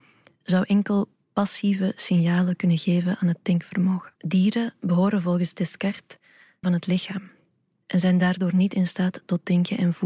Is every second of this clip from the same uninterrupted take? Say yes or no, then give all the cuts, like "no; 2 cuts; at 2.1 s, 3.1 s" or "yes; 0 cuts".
no; 2 cuts; at 4.2 s, 6.6 s